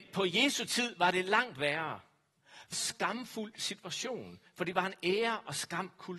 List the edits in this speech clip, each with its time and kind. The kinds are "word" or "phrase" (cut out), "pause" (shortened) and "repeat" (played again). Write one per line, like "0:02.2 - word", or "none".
0:02.7 - phrase